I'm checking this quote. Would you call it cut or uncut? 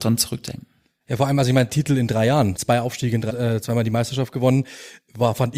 cut